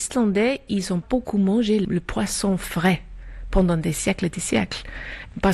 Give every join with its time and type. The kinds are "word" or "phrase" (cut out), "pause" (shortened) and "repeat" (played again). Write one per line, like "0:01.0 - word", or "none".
0:01.0 - word

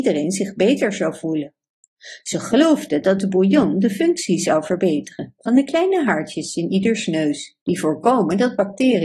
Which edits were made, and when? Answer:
0:07.6 - pause

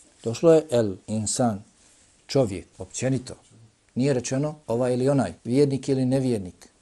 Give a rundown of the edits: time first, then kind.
0:01.0 - pause
0:02.7 - pause
0:04.6 - pause
0:05.4 - pause

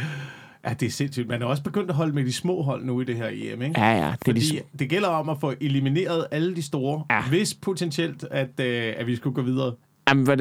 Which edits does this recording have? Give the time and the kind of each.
none

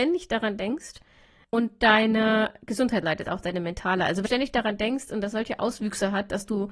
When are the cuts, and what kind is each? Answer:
0:01.4 - word
0:03.0 - word
0:04.3 - word

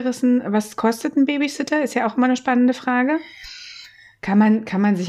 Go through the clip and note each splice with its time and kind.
none

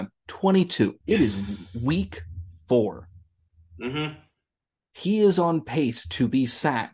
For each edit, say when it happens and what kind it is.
0:01.0 - pause

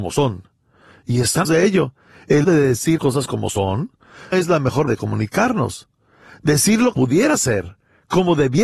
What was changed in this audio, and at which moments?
0:01.4 - word
0:02.4 - word
0:03.0 - word
0:04.3 - word
0:04.9 - word
0:06.9 - word

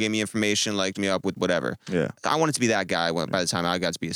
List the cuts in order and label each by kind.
0:00.9 - word

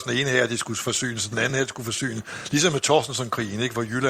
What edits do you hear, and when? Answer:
none

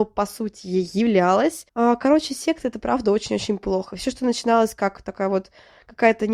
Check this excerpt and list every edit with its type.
0:01.7 - pause

